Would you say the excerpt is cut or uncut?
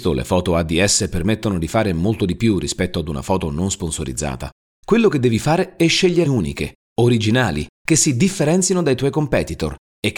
cut